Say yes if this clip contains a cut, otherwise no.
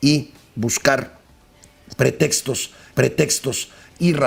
yes